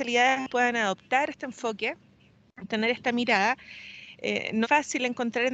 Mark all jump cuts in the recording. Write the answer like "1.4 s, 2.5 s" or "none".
2.7 s, 4.6 s